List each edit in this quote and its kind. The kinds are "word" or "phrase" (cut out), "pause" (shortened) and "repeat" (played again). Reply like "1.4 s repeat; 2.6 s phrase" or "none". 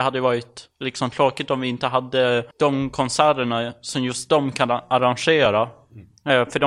2.5 s pause